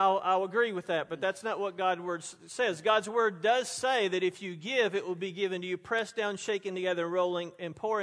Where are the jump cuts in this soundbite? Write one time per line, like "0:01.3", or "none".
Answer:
none